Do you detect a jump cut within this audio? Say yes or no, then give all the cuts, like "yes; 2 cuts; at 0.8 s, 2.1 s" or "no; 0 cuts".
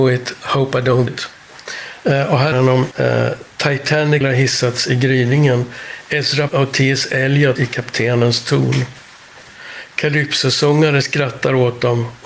yes; 6 cuts; at 1.1 s, 2.5 s, 2.9 s, 4.2 s, 6.5 s, 7.6 s